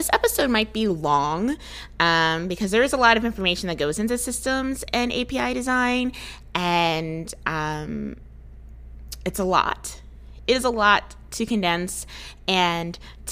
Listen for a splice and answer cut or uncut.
uncut